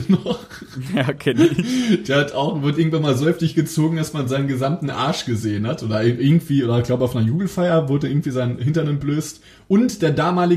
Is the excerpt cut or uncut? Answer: uncut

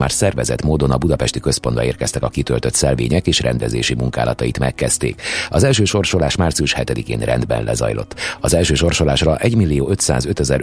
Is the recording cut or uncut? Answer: uncut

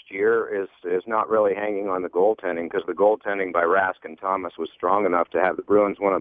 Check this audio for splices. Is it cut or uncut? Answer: cut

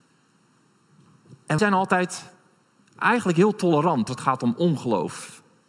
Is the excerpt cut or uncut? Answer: cut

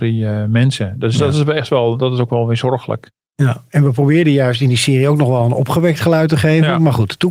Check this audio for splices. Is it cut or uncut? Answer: uncut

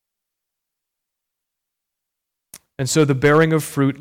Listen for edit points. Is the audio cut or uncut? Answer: uncut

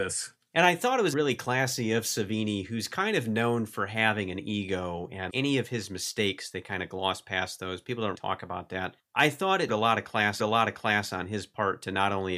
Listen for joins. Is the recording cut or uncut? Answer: cut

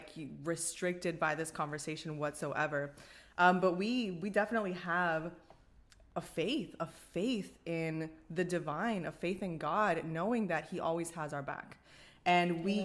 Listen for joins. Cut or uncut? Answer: uncut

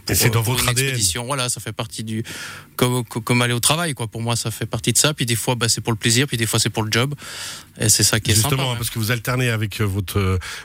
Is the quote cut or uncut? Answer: uncut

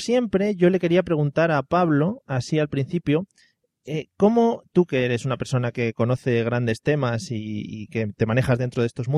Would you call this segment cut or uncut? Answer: uncut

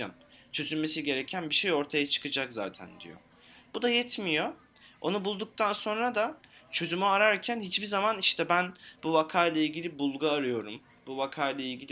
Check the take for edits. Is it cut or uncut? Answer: uncut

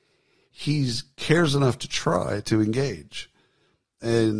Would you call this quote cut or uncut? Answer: uncut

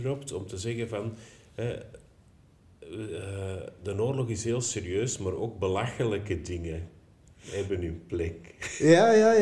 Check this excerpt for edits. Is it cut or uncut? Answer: uncut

